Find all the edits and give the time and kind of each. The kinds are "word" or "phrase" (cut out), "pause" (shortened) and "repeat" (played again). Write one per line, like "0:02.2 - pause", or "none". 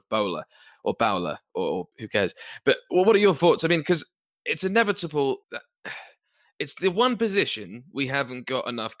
0:01.9 - pause
0:05.4 - pause